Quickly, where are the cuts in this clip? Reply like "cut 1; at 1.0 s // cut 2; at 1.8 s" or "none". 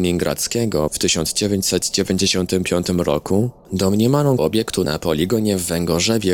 cut 1; at 4.4 s